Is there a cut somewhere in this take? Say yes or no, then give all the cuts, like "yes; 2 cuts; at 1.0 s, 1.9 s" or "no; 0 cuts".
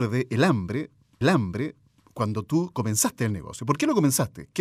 yes; 1 cut; at 1.2 s